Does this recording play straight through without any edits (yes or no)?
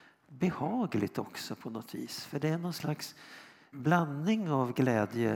yes